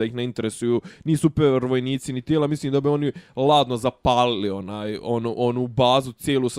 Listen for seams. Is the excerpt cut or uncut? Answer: uncut